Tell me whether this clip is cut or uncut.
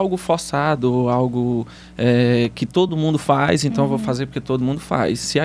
uncut